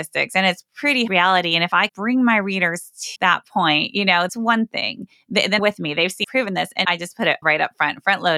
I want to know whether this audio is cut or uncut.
cut